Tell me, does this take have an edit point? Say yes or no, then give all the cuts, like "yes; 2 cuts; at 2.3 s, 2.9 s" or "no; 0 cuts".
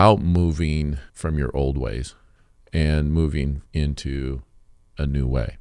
yes; 3 cuts; at 1.1 s, 2.4 s, 3.7 s